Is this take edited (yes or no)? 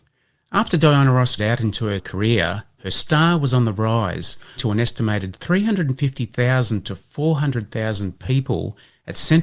yes